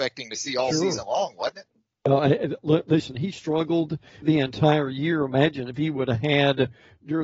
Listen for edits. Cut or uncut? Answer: cut